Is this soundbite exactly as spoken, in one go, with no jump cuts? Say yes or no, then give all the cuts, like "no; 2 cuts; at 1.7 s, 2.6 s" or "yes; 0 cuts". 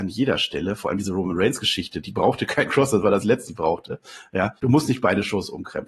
no; 3 cuts; at 2.7 s, 3.5 s, 4.6 s